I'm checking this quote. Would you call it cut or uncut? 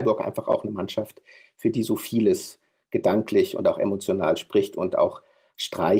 uncut